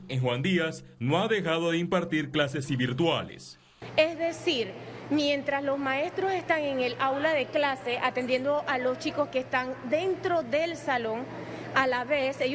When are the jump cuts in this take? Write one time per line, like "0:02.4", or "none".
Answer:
0:02.6